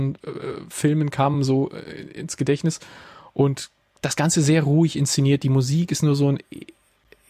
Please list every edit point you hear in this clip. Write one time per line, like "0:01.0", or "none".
none